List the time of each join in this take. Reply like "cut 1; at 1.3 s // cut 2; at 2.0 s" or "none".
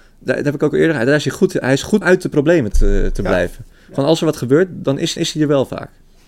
cut 1; at 2.0 s // cut 2; at 2.7 s // cut 3; at 5.2 s